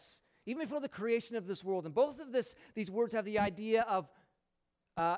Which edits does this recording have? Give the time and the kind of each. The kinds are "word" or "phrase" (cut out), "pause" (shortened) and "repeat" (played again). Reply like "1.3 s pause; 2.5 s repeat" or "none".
none